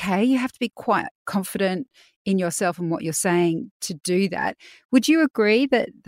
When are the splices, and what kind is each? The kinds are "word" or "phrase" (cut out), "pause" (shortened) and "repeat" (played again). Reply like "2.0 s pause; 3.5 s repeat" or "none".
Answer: none